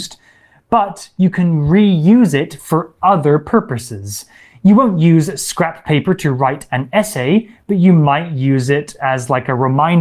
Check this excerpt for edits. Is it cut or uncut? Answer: uncut